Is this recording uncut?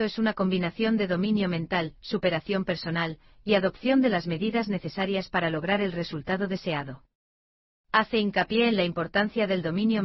yes; 0 cuts

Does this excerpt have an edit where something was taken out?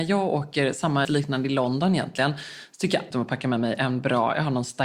yes; 2 cuts; at 1.0 s, 3.1 s

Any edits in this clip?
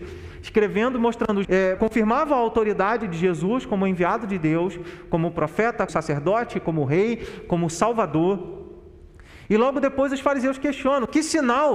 yes; 3 cuts; at 1.4 s, 1.8 s, 5.9 s

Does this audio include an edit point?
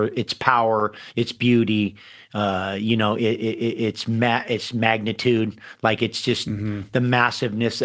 no; 0 cuts

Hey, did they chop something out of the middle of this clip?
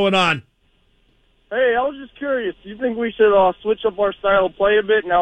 no; 0 cuts

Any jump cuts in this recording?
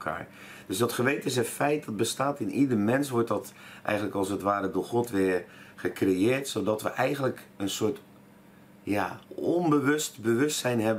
yes; 1 cut; at 9.2 s

